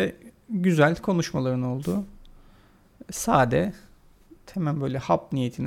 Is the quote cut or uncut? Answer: uncut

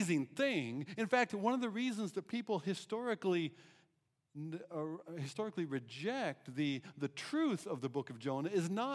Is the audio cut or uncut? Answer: uncut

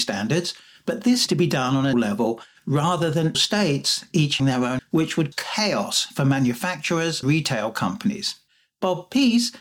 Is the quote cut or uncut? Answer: cut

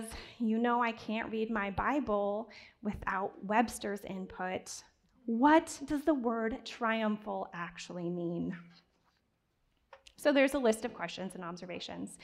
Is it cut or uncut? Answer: uncut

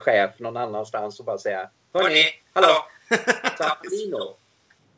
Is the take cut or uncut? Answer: cut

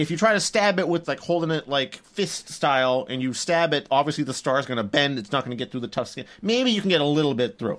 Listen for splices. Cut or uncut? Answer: cut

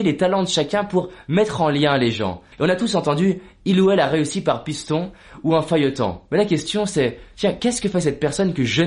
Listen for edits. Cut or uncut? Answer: cut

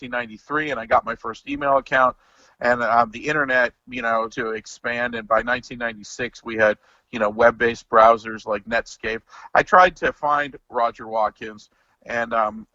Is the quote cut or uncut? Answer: cut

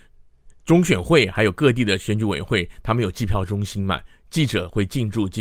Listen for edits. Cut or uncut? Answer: uncut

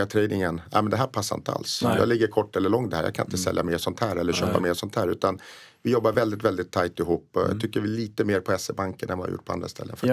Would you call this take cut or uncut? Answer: uncut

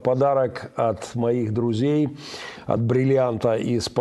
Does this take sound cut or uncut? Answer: uncut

